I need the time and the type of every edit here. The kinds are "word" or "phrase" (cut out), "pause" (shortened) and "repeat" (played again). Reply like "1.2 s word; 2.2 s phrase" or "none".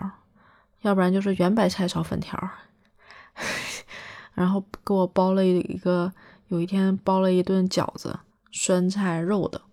8.3 s pause